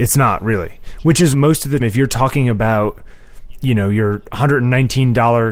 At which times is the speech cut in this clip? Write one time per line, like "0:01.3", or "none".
0:01.3
0:01.8